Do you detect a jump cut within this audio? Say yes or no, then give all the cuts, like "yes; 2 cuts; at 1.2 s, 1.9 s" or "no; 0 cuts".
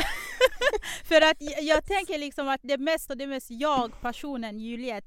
yes; 1 cut; at 3.1 s